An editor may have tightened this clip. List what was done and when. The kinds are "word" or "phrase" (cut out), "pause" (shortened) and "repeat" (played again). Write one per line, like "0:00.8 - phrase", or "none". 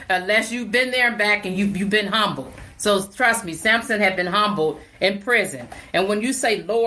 none